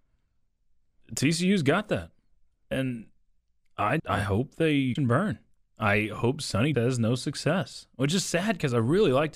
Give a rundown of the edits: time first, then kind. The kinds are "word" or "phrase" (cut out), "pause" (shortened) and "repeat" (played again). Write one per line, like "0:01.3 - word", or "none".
0:04.0 - word
0:05.0 - word
0:06.7 - word